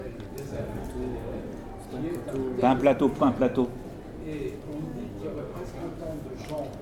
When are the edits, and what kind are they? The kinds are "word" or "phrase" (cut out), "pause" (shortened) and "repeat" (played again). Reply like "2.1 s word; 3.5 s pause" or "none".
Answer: 3.2 s word